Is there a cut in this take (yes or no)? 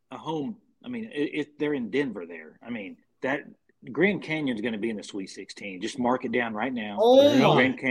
yes